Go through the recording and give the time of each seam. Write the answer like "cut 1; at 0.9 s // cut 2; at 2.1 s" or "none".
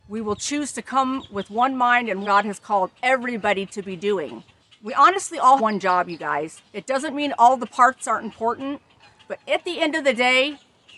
cut 1; at 2.2 s // cut 2; at 4.6 s // cut 3; at 5.6 s // cut 4; at 6.7 s